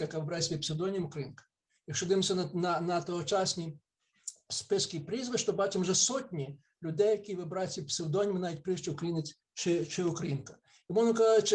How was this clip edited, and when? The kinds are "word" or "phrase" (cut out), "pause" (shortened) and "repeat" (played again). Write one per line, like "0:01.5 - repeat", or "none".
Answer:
0:09.4 - pause